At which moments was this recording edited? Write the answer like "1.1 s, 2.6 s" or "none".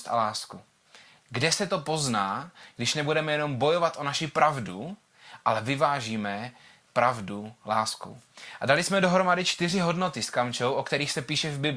none